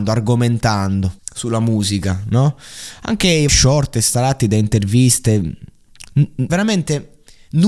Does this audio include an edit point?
yes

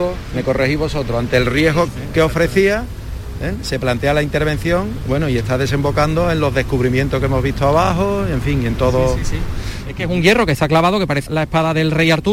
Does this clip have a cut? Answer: yes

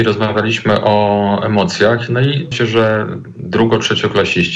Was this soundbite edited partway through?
yes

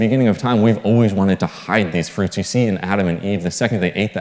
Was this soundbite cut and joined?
no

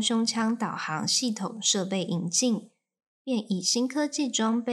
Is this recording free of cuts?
yes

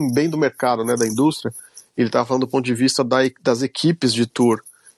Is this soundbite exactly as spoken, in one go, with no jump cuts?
yes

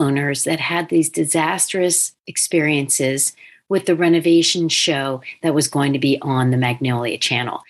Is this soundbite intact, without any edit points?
yes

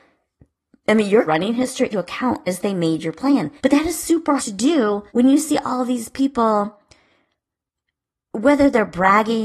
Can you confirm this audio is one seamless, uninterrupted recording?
no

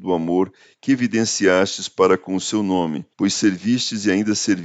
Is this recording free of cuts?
no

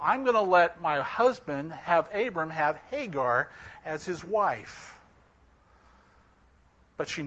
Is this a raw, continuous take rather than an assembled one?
yes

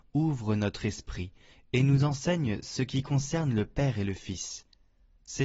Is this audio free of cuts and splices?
yes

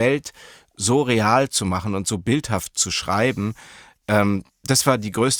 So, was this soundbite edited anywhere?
no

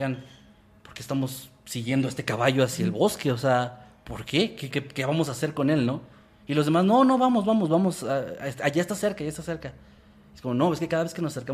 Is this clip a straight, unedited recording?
no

